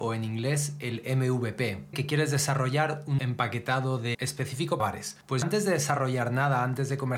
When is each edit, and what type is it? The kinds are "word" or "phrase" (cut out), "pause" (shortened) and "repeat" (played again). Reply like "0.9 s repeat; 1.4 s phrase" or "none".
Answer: 1.9 s word; 3.2 s word; 4.1 s word; 4.8 s word; 5.4 s word